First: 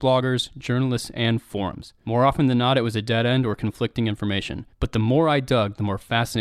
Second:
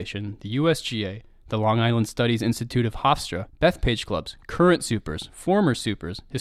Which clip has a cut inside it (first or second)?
first